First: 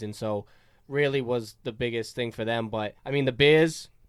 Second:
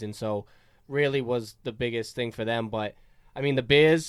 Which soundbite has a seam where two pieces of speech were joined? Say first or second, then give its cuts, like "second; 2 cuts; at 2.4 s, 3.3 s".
first; 1 cut; at 3.0 s